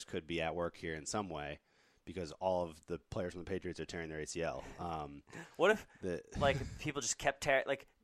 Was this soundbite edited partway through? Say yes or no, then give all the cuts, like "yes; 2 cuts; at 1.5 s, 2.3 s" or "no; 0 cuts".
no; 0 cuts